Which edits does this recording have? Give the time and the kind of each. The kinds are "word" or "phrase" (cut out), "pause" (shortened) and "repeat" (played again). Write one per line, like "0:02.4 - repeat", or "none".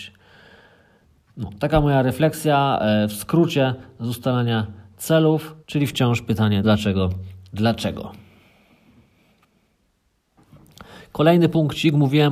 0:05.6 - pause
0:06.6 - word